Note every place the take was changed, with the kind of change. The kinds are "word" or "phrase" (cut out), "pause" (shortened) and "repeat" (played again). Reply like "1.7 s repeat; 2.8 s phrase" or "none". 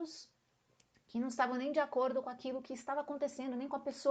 none